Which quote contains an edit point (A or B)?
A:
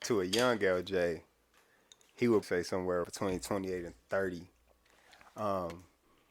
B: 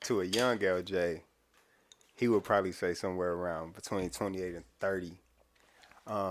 A